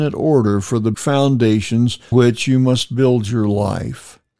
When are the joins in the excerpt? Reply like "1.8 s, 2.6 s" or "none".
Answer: 0.9 s, 2.1 s